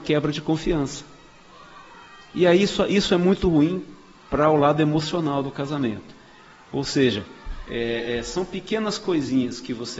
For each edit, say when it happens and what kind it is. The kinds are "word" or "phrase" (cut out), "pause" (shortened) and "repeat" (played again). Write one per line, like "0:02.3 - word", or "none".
none